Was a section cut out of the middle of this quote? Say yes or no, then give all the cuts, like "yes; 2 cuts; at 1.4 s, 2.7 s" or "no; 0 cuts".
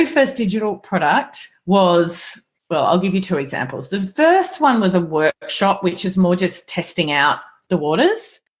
no; 0 cuts